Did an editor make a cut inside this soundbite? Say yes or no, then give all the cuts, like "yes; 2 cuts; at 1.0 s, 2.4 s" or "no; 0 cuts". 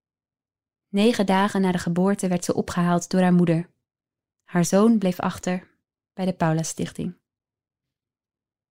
no; 0 cuts